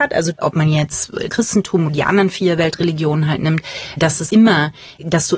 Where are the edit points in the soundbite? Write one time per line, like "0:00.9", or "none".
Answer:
0:01.3
0:01.9
0:04.3